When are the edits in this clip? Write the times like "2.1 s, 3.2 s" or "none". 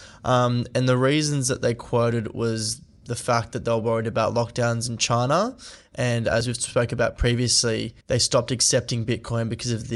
8.0 s